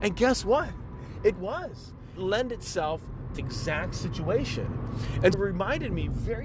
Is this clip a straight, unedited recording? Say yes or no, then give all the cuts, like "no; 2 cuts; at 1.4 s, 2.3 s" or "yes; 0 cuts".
no; 4 cuts; at 1.4 s, 2.2 s, 3.4 s, 5.3 s